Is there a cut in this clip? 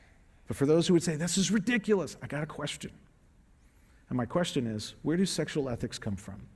no; 0 cuts

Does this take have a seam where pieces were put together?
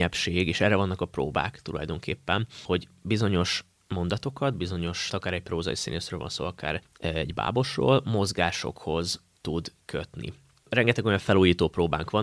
yes; 1 cut; at 5.1 s

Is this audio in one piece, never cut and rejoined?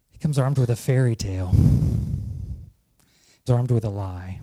no; 1 cut; at 3.5 s

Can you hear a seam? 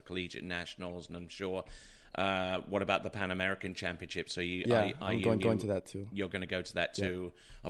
yes; 1 cut; at 5.4 s

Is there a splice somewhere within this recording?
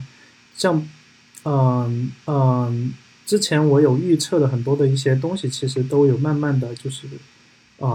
yes; 1 cut; at 2.3 s

